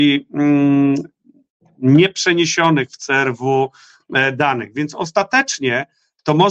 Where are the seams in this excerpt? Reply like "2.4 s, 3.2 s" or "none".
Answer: none